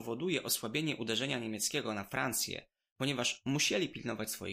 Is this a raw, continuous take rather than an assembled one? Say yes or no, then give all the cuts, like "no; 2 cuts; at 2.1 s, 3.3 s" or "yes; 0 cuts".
yes; 0 cuts